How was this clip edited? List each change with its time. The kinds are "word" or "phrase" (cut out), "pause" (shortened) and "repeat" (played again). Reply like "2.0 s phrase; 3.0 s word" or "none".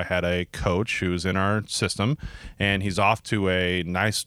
none